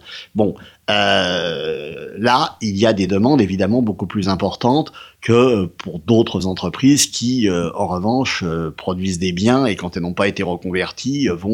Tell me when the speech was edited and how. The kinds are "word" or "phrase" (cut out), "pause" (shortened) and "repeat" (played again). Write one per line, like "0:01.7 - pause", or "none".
none